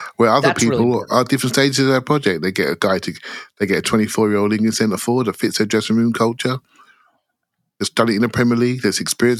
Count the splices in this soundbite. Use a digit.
0